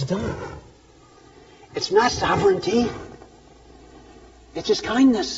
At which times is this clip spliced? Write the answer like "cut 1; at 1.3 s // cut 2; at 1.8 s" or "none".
cut 1; at 2.1 s